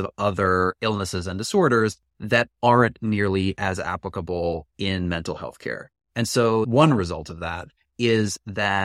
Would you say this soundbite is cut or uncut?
uncut